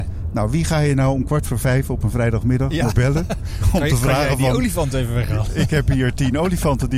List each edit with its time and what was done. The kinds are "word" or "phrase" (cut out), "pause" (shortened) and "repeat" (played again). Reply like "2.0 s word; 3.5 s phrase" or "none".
2.9 s word